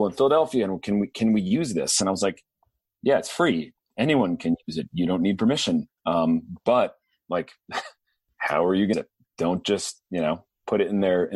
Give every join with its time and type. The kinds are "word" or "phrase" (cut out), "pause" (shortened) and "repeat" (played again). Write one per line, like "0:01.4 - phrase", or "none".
0:06.0 - pause
0:08.9 - phrase